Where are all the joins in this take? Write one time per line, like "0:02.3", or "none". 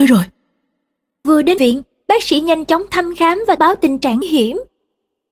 0:01.6
0:03.6
0:04.2